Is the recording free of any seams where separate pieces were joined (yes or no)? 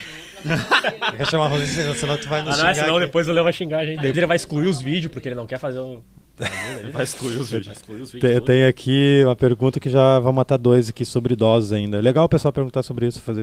no